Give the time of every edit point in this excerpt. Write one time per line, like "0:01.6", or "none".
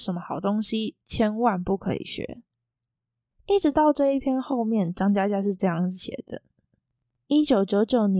none

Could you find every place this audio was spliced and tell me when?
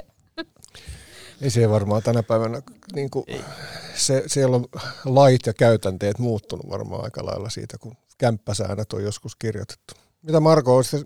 none

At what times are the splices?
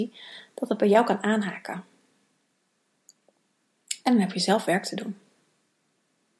none

